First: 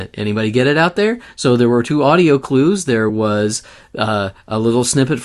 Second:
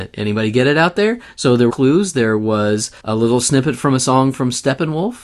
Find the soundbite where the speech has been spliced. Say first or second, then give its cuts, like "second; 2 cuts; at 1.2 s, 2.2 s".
second; 2 cuts; at 1.7 s, 3.0 s